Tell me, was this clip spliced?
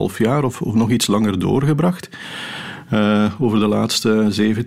no; 0 cuts

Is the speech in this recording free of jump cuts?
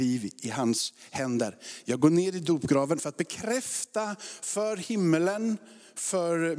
yes; 0 cuts

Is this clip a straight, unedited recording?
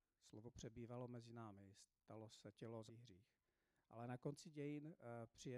no; 2 cuts; at 2.5 s, 2.9 s

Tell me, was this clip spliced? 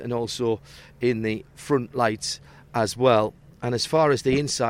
no; 0 cuts

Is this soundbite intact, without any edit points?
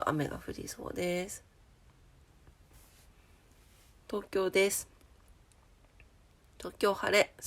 yes; 0 cuts

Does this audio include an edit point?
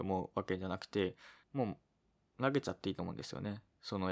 yes; 1 cut; at 1.4 s

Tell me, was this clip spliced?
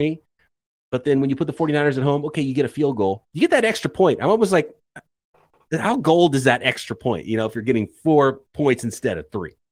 no; 0 cuts

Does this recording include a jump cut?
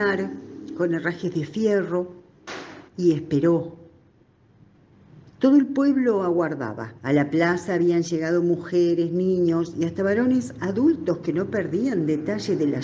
yes; 3 cuts; at 2.9 s, 5.3 s, 7.0 s

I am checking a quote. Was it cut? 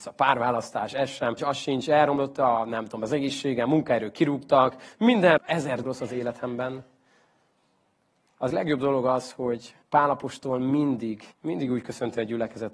yes; 6 cuts; at 1.4 s, 5.4 s, 5.8 s, 8.5 s, 9.8 s, 11.3 s

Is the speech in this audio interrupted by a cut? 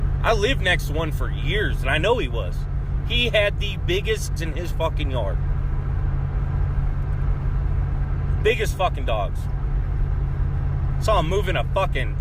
yes; 1 cut; at 4.4 s

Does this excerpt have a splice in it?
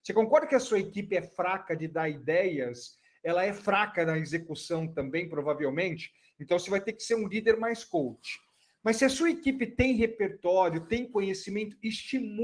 no; 0 cuts

